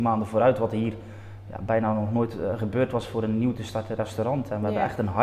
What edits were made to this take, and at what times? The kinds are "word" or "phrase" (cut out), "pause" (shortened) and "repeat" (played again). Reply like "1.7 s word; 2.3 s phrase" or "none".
none